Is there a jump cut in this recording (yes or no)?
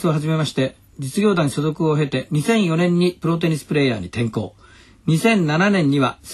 no